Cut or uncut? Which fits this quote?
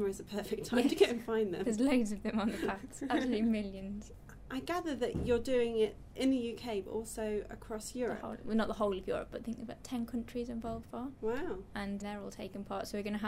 cut